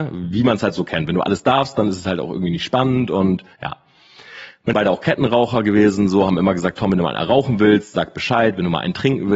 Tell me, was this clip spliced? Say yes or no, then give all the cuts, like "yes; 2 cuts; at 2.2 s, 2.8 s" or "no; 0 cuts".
yes; 2 cuts; at 3.5 s, 4.7 s